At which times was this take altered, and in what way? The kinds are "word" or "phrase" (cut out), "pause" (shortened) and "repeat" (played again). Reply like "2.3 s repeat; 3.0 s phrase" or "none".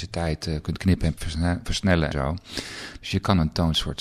1.2 s word; 2.1 s word